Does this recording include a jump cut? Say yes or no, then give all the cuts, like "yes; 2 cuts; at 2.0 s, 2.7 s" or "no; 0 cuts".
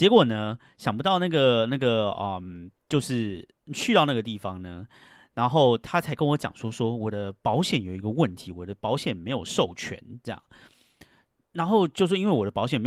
no; 0 cuts